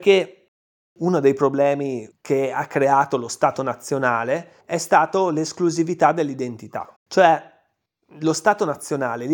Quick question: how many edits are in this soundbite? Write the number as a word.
three